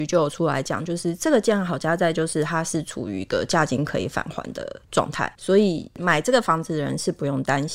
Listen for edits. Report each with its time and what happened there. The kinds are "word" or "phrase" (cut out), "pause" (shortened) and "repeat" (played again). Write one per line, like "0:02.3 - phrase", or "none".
0:04.8 - pause
0:05.3 - pause

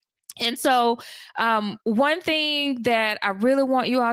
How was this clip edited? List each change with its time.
0:01.8 - pause

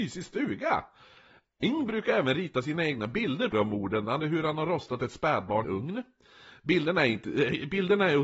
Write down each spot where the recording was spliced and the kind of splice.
0:03.5 - word
0:04.2 - word
0:05.6 - phrase

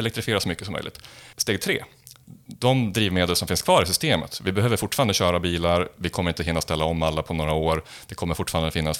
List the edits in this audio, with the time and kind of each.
0:01.3 - pause

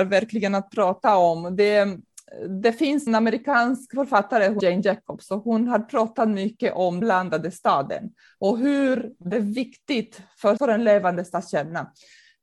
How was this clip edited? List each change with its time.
0:03.1 - word
0:04.6 - word
0:07.0 - word
0:09.3 - word
0:10.6 - word

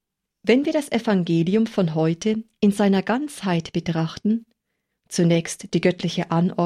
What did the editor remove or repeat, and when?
none

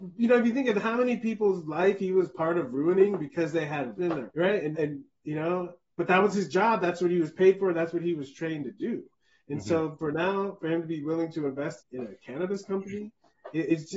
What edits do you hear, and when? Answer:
0:04.0 - word
0:04.3 - word
0:04.7 - word
0:11.8 - word

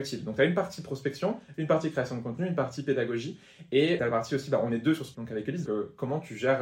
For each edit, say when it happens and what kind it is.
0:04.0 - word
0:05.1 - word
0:05.6 - word

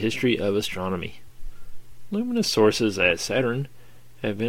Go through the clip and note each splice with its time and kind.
none

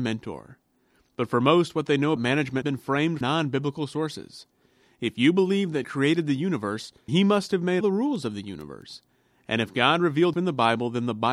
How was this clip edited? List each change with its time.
0:02.2 - word
0:02.6 - word
0:03.2 - word
0:05.8 - word
0:07.1 - word
0:07.8 - word
0:10.3 - word

